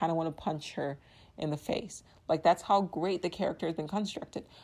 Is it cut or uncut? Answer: uncut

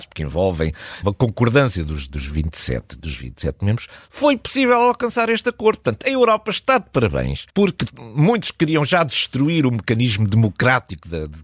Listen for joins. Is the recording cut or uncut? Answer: cut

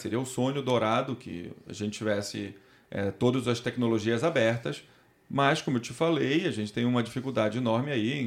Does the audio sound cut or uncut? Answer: uncut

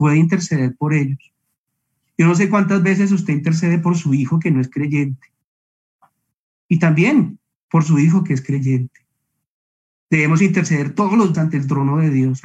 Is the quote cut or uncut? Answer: cut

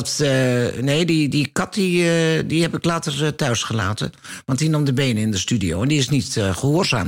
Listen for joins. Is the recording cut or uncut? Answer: uncut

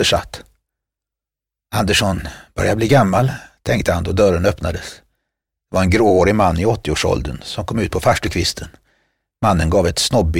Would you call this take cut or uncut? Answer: uncut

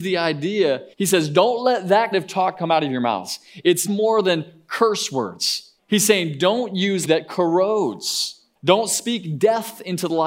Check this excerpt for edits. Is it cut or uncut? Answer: cut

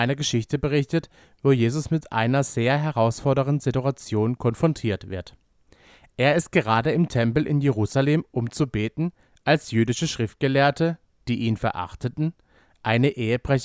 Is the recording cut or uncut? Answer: uncut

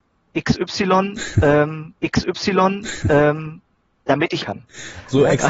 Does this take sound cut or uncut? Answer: cut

